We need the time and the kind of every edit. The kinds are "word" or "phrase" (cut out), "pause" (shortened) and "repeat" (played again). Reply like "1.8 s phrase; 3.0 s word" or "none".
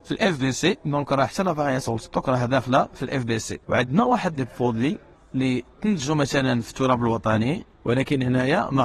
3.6 s pause; 5.1 s pause; 7.7 s pause